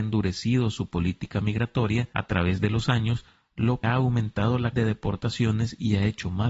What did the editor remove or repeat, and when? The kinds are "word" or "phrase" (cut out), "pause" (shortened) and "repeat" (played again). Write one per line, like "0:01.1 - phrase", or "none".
0:03.8 - word
0:04.7 - word